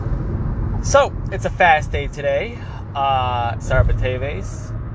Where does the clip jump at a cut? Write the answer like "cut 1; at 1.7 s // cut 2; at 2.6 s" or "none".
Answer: cut 1; at 3.6 s